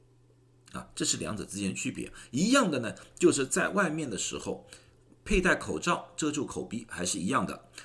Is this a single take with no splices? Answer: yes; 0 cuts

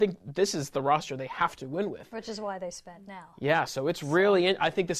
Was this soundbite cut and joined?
no; 0 cuts

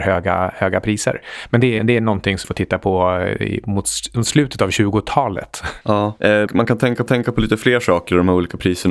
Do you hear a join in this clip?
yes; 4 cuts; at 1.8 s, 2.4 s, 6.5 s, 7.1 s

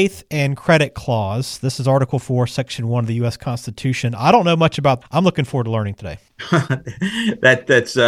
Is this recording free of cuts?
no; 2 cuts; at 5.0 s, 6.3 s

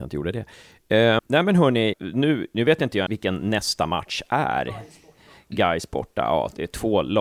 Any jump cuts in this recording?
yes; 3 cuts; at 1.2 s, 1.9 s, 3.1 s

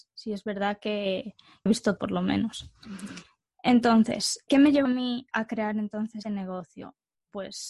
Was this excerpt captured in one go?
no; 6 cuts; at 1.7 s, 2.0 s, 4.5 s, 4.8 s, 5.3 s, 6.2 s

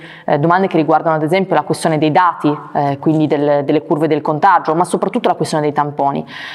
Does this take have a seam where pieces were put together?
no; 0 cuts

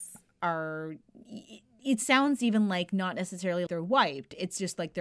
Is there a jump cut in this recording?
yes; 1 cut; at 3.7 s

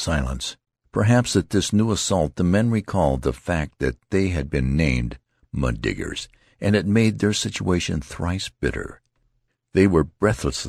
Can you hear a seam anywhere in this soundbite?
no; 0 cuts

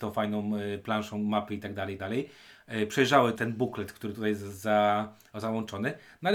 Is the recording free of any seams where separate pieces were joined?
no; 2 cuts; at 2.0 s, 3.4 s

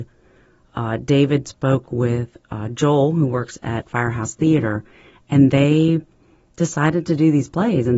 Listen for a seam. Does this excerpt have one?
no; 0 cuts

